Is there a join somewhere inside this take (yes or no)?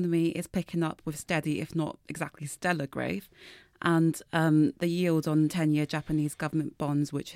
no